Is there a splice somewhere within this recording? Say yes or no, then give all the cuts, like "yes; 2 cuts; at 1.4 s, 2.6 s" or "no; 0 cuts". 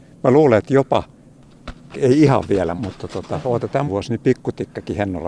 yes; 3 cuts; at 1.9 s, 2.8 s, 3.9 s